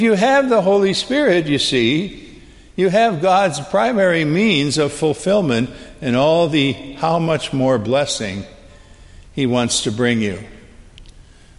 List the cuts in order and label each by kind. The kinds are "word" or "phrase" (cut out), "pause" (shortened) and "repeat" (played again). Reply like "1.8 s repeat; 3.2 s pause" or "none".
none

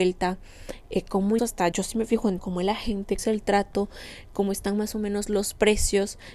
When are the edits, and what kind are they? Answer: 1.4 s word; 1.7 s word; 2.4 s word; 3.2 s word

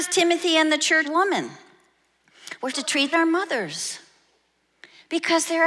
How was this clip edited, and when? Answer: 1.0 s phrase; 2.7 s word; 3.1 s phrase

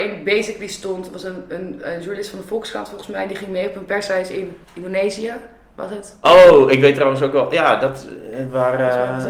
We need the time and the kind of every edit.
4.6 s pause

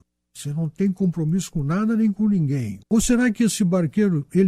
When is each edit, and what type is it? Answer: 2.8 s pause

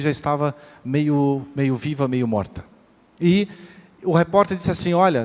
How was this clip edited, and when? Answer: none

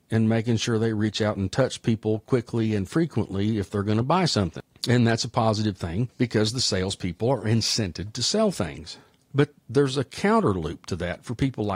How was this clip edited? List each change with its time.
none

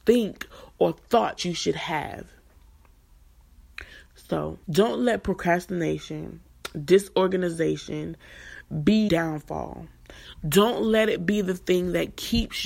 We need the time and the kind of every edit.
1.4 s word; 4.6 s pause; 9.1 s word

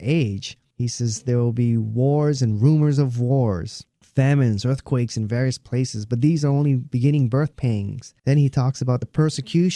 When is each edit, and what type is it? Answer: 8.2 s pause

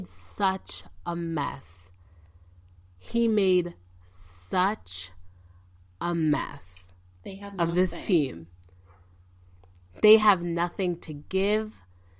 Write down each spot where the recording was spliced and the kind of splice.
none

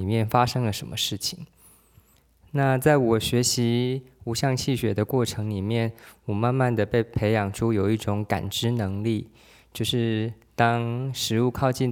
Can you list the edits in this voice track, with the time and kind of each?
none

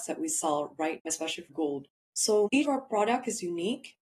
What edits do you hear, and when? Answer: 1.0 s word; 1.5 s word; 2.6 s word

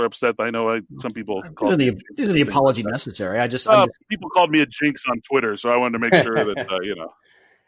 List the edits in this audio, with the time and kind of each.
4.0 s pause

